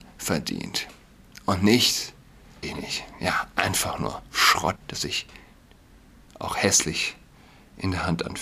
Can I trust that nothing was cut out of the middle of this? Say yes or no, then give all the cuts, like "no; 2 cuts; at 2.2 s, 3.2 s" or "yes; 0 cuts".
no; 2 cuts; at 2.6 s, 4.8 s